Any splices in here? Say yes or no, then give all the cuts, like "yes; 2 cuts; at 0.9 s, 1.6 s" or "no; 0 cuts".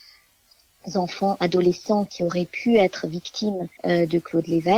yes; 1 cut; at 3.8 s